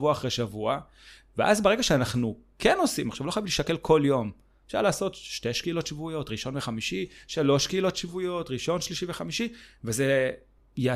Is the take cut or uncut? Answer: uncut